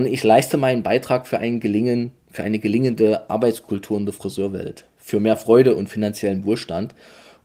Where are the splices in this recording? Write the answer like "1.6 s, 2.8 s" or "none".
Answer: none